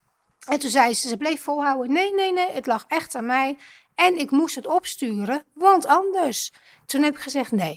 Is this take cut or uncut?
uncut